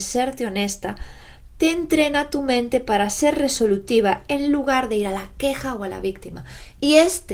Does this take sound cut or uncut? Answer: uncut